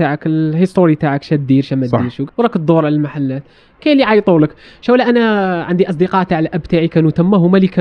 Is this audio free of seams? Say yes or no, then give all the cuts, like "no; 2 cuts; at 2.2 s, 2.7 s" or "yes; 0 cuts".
no; 1 cut; at 2.3 s